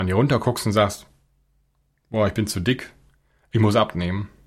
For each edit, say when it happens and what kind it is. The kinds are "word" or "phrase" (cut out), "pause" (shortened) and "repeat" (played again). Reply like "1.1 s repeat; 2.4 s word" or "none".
none